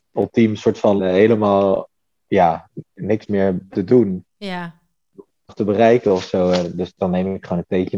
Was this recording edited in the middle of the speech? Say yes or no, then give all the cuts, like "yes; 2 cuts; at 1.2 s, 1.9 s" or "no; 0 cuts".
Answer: yes; 6 cuts; at 1.0 s, 2.0 s, 2.9 s, 3.7 s, 4.3 s, 5.5 s